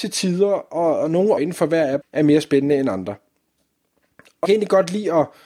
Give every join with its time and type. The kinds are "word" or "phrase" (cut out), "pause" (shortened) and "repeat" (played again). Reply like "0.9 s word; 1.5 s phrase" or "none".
1.4 s word; 2.0 s word; 4.5 s word

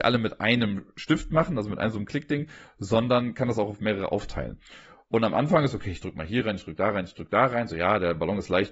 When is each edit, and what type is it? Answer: none

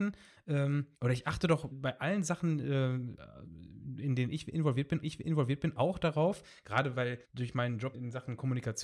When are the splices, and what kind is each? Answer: 0.9 s pause; 1.7 s word; 5.0 s repeat; 7.2 s pause; 7.9 s word

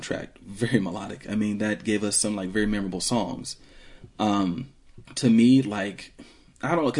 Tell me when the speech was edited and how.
5.0 s pause

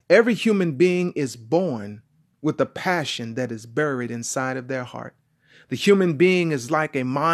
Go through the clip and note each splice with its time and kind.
none

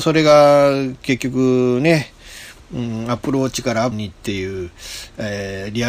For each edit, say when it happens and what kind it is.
3.9 s word

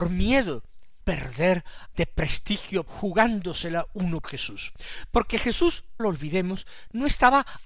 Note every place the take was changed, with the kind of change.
1.0 s word; 1.9 s word; 2.9 s word; 4.2 s word; 6.0 s word

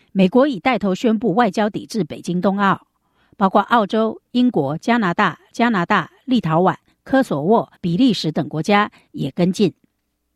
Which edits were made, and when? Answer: 5.5 s repeat; 7.8 s pause

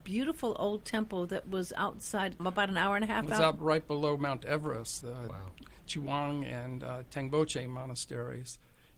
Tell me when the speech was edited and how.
2.4 s phrase; 5.0 s word

